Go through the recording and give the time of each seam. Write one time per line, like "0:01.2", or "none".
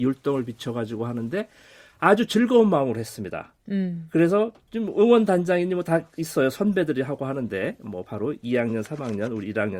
none